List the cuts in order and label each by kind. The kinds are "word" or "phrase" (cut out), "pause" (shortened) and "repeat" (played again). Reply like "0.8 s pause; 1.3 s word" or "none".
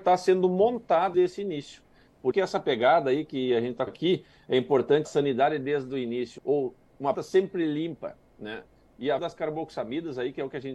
1.1 s word; 2.3 s word; 3.9 s word; 5.0 s word; 6.4 s word; 7.1 s word; 9.2 s word